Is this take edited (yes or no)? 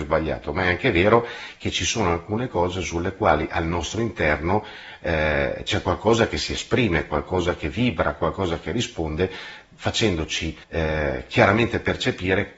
yes